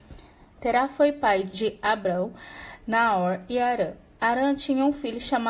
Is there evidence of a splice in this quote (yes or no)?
no